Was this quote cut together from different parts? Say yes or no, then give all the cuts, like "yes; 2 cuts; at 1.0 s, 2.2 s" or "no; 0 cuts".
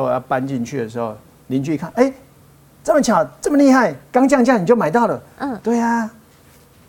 no; 0 cuts